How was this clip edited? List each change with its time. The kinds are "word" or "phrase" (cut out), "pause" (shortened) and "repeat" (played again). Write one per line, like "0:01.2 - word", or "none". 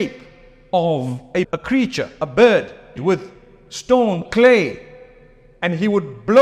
0:01.4 - word
0:03.0 - word
0:04.2 - word